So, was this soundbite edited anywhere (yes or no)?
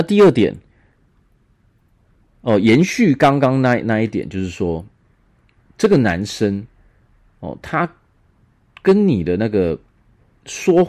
no